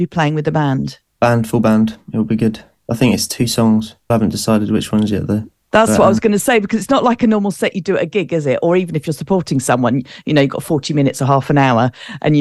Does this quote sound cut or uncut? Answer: cut